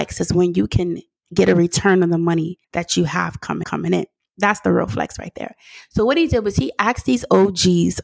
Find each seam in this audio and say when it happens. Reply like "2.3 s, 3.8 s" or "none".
1.2 s, 2.6 s, 3.6 s